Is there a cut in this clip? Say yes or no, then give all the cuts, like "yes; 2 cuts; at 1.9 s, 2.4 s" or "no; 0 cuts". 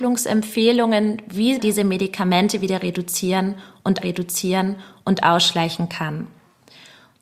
yes; 2 cuts; at 1.6 s, 4.0 s